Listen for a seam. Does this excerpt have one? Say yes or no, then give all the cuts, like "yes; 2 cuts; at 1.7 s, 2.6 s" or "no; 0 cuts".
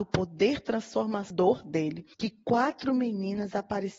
yes; 1 cut; at 2.1 s